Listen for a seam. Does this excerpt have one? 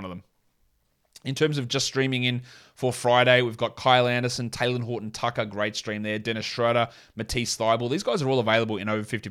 no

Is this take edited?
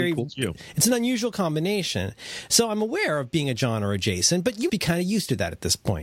yes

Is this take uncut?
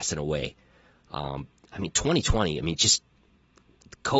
yes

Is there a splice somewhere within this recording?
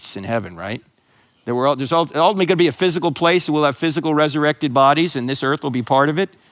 no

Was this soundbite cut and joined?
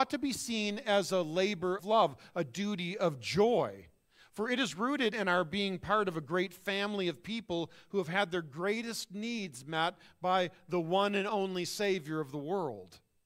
yes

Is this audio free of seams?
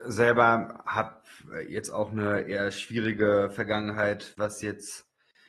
yes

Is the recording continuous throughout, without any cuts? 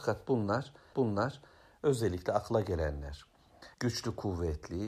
no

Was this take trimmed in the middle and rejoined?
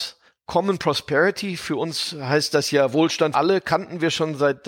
yes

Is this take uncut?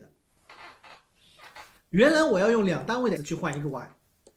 no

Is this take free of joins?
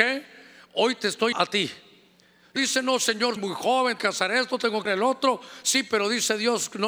no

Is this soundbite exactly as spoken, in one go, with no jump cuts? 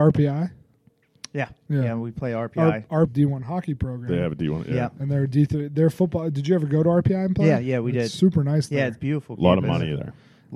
no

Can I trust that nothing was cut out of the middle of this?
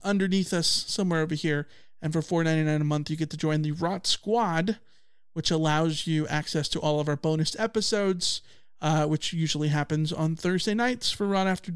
yes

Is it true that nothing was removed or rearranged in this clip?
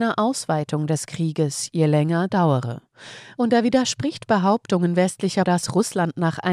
no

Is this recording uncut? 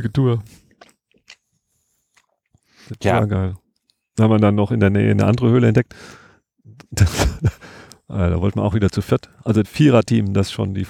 no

